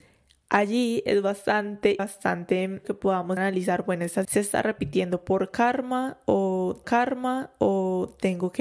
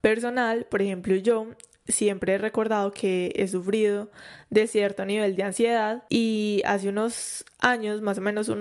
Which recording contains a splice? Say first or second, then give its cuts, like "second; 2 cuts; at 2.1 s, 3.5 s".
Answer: first; 5 cuts; at 2.0 s, 2.8 s, 3.4 s, 4.2 s, 6.8 s